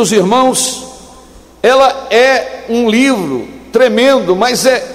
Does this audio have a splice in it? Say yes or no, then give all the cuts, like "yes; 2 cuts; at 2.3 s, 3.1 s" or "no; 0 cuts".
no; 0 cuts